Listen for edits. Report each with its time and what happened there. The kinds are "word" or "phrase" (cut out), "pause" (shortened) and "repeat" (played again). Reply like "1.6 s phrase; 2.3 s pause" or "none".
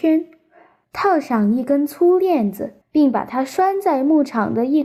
2.8 s pause